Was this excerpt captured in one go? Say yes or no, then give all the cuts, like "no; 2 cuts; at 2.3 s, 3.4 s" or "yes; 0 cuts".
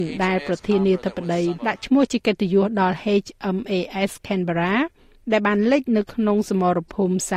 no; 1 cut; at 1.6 s